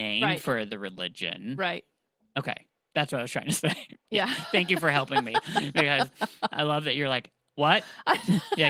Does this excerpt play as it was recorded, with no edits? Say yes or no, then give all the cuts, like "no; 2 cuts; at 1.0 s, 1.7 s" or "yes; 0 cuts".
yes; 0 cuts